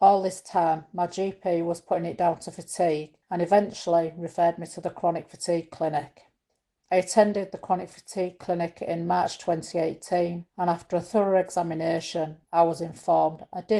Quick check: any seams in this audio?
yes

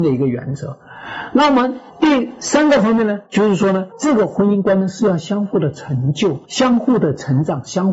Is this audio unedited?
no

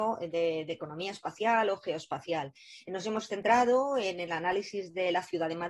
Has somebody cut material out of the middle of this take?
no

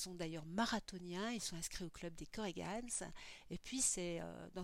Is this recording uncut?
yes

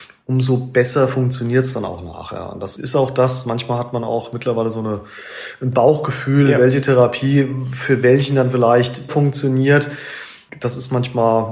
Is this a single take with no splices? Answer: no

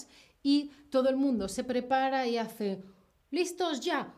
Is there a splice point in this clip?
no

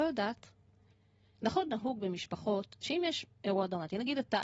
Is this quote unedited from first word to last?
yes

